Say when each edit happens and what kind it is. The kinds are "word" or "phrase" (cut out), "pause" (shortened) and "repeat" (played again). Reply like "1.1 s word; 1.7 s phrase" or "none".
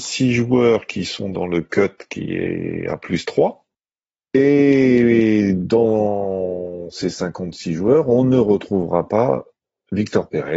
none